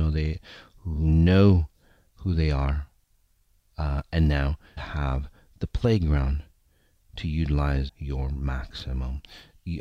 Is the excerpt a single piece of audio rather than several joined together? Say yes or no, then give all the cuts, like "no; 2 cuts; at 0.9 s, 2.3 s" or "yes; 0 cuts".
no; 2 cuts; at 4.8 s, 7.9 s